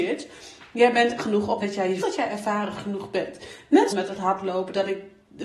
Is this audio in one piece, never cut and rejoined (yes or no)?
no